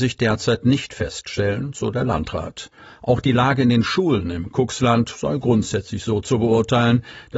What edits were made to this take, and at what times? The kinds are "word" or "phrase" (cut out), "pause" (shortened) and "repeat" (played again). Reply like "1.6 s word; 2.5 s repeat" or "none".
none